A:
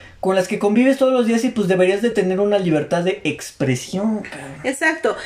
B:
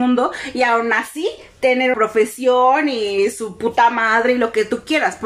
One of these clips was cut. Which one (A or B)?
B